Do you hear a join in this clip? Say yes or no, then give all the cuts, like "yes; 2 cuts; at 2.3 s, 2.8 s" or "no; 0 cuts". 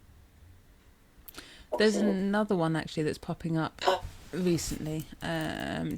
no; 0 cuts